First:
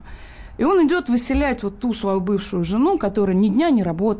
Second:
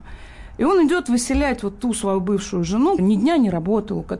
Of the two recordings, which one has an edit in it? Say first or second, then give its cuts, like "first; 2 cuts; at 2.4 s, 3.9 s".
second; 1 cut; at 3.0 s